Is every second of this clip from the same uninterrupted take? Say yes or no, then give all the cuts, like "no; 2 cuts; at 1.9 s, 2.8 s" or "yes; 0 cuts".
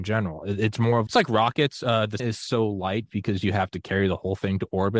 no; 2 cuts; at 1.1 s, 2.2 s